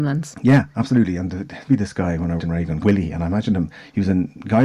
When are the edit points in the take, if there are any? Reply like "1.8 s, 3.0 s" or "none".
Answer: 1.7 s, 2.4 s, 2.8 s